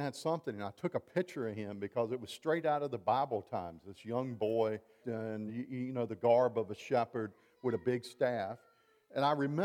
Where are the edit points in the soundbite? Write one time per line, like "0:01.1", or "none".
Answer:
0:05.0
0:05.5